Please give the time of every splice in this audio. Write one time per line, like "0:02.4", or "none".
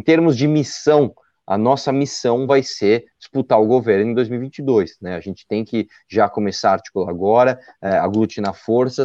none

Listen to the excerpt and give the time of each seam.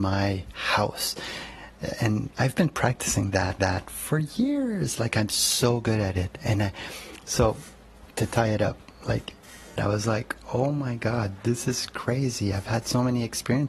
0:02.3
0:03.6
0:08.1
0:09.8

